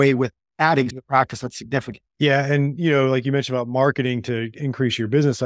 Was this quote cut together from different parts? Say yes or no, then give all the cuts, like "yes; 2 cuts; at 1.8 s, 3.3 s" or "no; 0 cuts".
yes; 2 cuts; at 0.9 s, 2.1 s